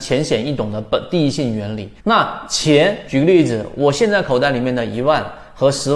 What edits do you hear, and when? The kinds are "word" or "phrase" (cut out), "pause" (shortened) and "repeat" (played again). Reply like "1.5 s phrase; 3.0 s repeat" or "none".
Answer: 2.0 s pause

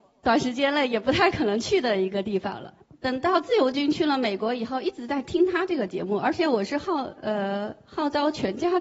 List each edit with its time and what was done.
2.8 s pause

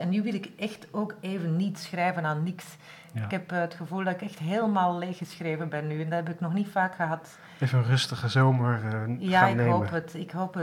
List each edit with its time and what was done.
none

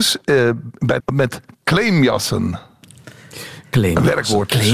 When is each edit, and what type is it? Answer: 1.0 s word

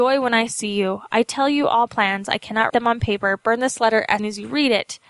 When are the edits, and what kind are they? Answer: 1.9 s word; 2.7 s word; 4.2 s word

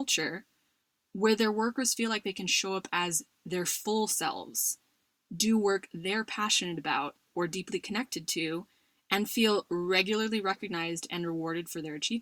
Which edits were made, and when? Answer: none

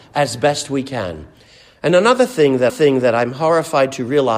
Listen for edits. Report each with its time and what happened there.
2.7 s repeat

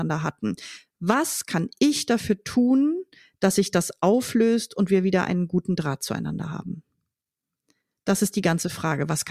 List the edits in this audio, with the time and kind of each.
none

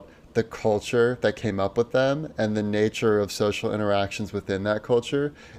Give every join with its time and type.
none

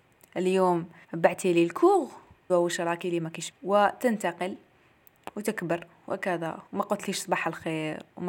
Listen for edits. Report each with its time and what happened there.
1.0 s pause; 2.5 s word; 3.0 s word; 3.5 s word; 6.7 s pause

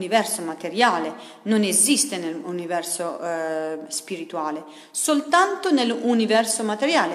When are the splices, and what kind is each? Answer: none

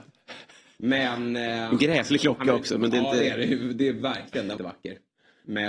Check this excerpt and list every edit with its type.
4.6 s word

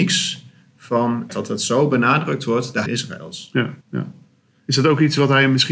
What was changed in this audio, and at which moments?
1.3 s word; 2.9 s word; 3.8 s pause

